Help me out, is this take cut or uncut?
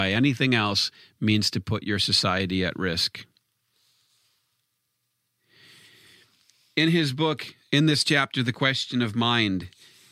uncut